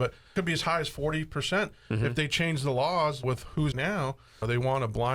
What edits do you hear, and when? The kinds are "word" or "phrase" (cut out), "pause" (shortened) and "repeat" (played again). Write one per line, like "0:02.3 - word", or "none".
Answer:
0:03.7 - phrase